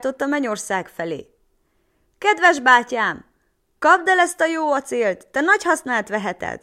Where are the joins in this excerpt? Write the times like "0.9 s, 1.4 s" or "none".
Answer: none